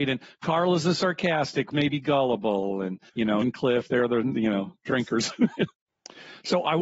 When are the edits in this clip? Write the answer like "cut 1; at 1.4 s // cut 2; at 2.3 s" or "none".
cut 1; at 1.7 s // cut 2; at 3.1 s // cut 3; at 3.4 s // cut 4; at 4.8 s